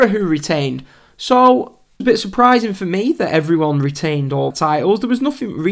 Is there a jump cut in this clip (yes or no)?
yes